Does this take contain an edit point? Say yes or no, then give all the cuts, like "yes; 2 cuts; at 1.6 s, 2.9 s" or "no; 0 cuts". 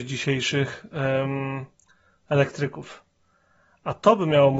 no; 0 cuts